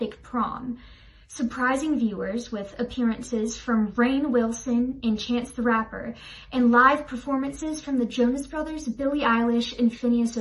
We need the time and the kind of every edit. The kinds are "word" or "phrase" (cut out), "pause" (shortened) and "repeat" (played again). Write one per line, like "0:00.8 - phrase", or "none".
none

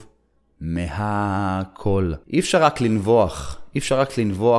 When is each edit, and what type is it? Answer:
0:02.2 - pause

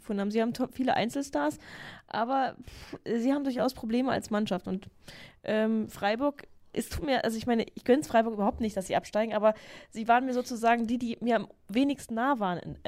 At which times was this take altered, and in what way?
none

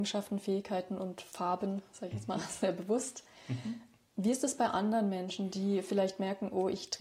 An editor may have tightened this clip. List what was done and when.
none

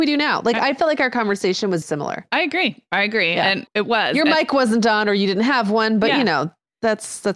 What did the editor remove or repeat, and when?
0:01.8 - word
0:03.7 - word

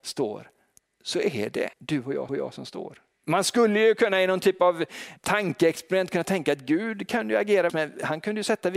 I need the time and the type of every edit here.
0:01.7 - pause
0:02.3 - repeat
0:03.1 - pause
0:05.2 - word
0:07.7 - word

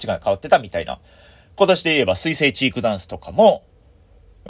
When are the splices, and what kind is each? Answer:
none

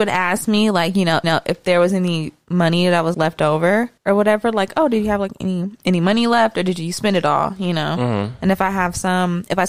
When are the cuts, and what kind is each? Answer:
0:01.2 - repeat
0:03.1 - word
0:04.0 - pause

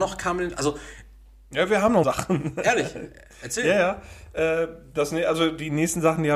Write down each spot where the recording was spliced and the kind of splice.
0:02.0 - phrase

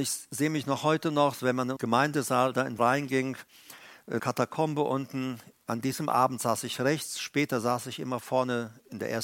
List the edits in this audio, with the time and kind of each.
0:01.8 - word
0:02.8 - word
0:04.2 - word

